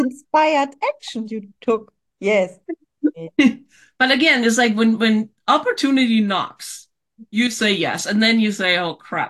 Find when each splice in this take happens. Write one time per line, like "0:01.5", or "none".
0:02.6